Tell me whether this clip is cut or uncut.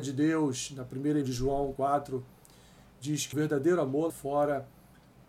cut